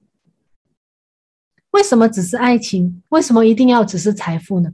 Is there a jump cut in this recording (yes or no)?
yes